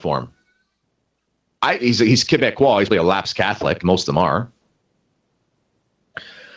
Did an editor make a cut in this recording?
yes; 2 cuts; at 2.9 s, 3.8 s

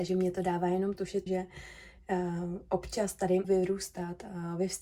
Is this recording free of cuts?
no; 2 cuts; at 1.3 s, 3.4 s

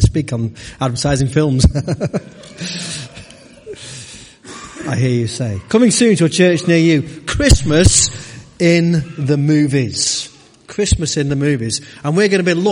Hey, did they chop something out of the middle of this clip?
no; 0 cuts

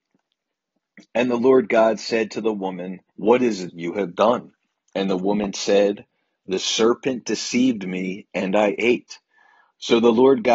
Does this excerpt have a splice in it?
yes; 2 cuts; at 3.1 s, 3.7 s

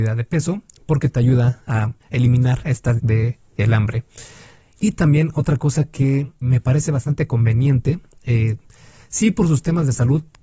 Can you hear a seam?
yes; 3 cuts; at 2.0 s, 3.0 s, 6.4 s

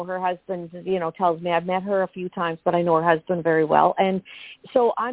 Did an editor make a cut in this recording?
no; 0 cuts

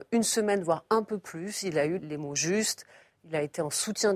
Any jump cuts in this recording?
yes; 1 cut; at 2.0 s

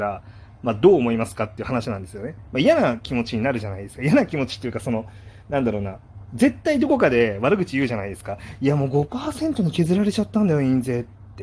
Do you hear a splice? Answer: no; 0 cuts

